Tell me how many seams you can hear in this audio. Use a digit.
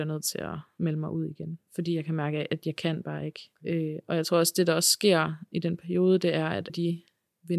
2